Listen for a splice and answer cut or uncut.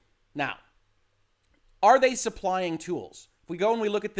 uncut